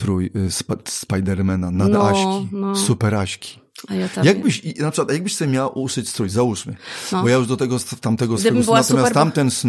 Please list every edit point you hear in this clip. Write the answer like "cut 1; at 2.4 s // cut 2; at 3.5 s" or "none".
none